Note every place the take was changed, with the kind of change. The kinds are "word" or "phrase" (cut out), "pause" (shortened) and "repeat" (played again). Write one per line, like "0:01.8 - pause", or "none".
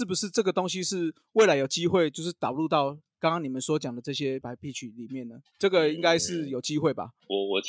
0:04.4 - word